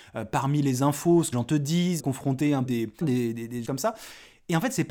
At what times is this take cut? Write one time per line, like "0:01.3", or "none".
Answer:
0:01.3
0:02.0
0:02.6
0:03.0
0:03.6